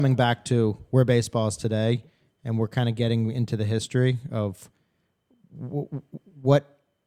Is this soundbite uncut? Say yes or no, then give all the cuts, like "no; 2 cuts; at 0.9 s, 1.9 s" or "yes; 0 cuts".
yes; 0 cuts